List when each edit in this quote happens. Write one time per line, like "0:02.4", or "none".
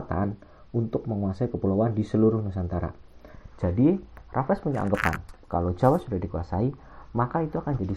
none